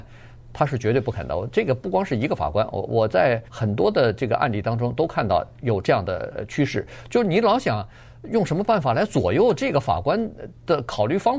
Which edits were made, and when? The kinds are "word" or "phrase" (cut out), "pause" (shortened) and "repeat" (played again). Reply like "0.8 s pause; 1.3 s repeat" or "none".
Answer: 3.5 s pause